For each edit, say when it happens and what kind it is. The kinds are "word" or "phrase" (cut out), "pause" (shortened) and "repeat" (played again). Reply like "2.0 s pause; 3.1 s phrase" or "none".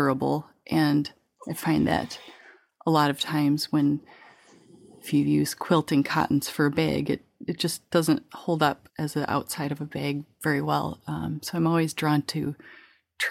8.9 s word